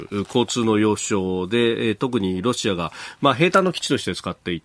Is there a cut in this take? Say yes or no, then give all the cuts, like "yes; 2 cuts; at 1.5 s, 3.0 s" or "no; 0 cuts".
no; 0 cuts